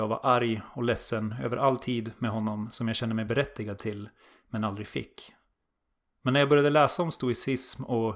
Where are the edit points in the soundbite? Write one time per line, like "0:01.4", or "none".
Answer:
none

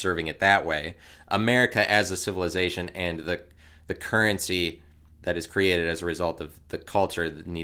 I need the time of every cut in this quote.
none

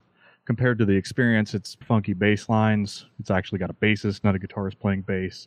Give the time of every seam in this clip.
0:01.8

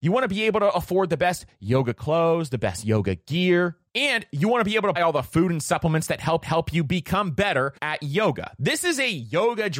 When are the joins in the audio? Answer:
0:05.0
0:06.4
0:07.8

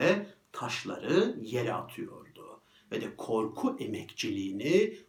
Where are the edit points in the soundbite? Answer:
none

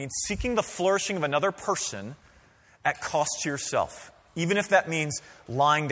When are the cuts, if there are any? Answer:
none

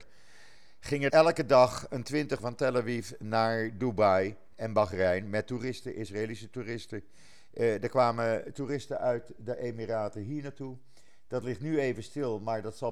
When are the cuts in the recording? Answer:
0:01.1
0:02.4

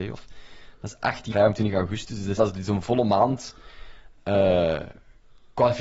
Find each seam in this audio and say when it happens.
0:01.3
0:02.4

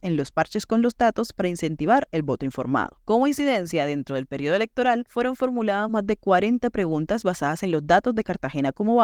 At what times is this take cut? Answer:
none

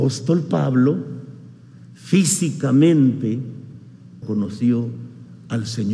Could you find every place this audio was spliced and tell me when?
0:04.2

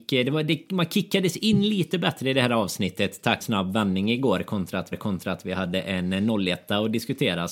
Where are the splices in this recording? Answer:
0:03.4
0:04.9

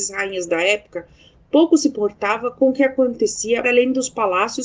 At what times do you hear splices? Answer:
0:03.6

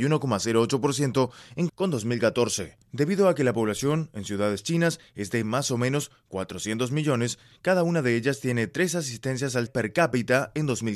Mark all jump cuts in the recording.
0:01.7
0:02.8
0:09.7

